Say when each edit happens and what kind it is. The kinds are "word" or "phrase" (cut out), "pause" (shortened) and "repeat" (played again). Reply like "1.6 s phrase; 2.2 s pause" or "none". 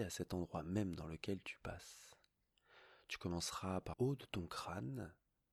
3.9 s word

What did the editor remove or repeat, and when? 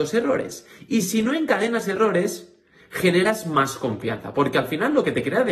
none

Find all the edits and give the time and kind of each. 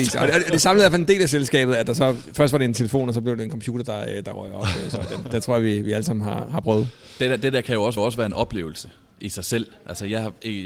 8.0 s repeat

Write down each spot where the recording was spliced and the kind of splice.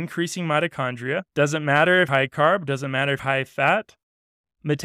1.3 s pause; 2.1 s word; 3.2 s word

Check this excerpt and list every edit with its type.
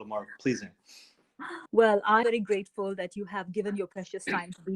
1.7 s pause; 2.2 s word

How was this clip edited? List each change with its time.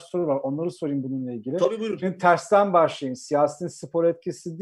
none

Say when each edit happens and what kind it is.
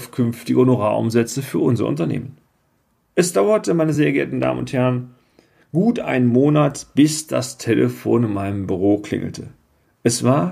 none

